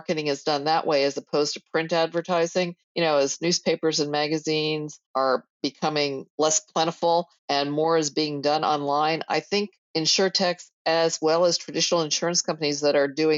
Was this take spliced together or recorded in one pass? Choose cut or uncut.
cut